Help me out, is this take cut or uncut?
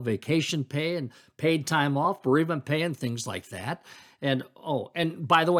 uncut